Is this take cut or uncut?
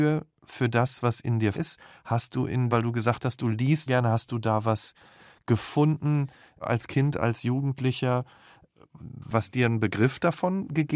cut